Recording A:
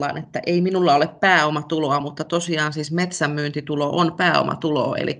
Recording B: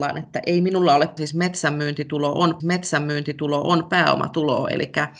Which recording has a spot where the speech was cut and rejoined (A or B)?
B